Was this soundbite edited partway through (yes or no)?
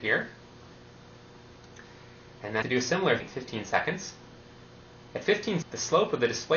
yes